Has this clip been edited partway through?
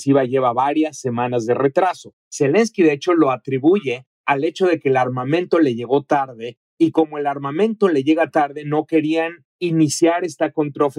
yes; 1 cut; at 9.5 s

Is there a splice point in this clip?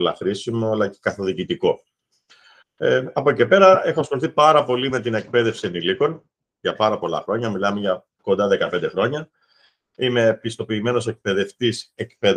no; 0 cuts

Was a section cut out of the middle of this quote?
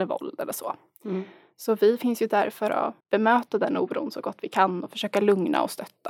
yes; 1 cut; at 3.0 s

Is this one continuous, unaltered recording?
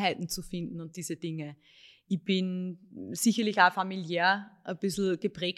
yes; 0 cuts

